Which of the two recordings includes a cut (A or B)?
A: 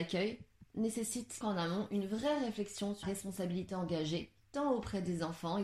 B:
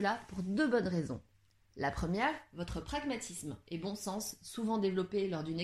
A